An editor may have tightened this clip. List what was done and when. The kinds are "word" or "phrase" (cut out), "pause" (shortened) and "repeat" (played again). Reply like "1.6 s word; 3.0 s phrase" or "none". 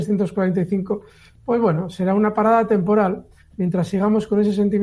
none

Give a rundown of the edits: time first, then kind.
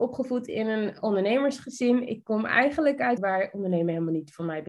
3.2 s phrase

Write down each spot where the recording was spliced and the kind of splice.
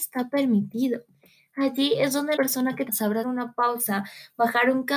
2.4 s word; 2.9 s word; 3.2 s word

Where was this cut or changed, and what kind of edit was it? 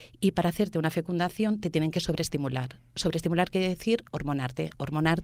none

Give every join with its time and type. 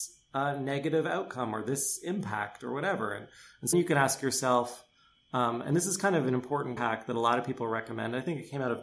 3.7 s word; 6.8 s word

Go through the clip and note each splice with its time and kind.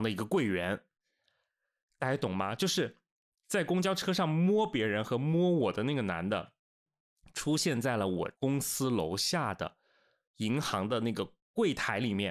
8.3 s pause

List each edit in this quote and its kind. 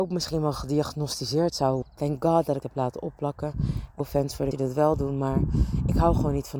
1.8 s phrase; 2.6 s phrase; 4.0 s word; 4.5 s word

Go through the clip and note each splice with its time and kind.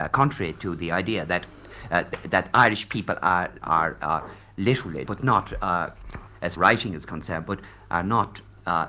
3.6 s word; 5.1 s word; 6.6 s phrase

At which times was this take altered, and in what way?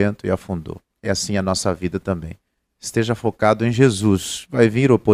none

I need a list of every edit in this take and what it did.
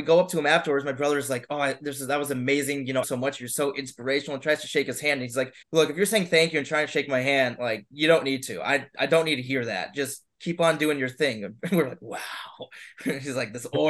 3.0 s phrase; 5.6 s pause

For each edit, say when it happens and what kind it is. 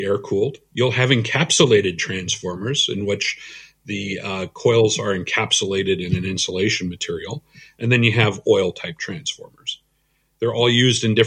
none

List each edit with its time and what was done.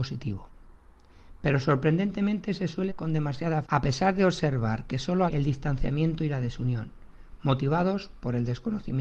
2.9 s word; 3.6 s word; 5.3 s word

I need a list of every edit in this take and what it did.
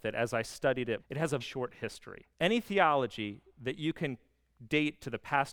1.0 s phrase; 1.4 s word; 2.3 s pause

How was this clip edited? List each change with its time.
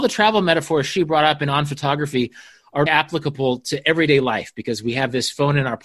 2.9 s word

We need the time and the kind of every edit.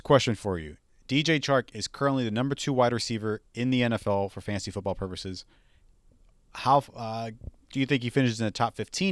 none

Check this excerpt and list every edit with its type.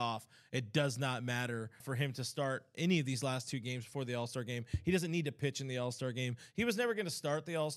1.8 s word

